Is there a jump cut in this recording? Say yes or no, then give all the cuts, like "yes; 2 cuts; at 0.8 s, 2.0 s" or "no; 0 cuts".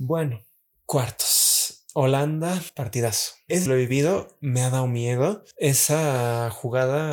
yes; 1 cut; at 3.7 s